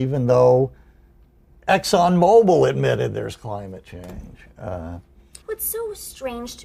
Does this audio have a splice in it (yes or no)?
yes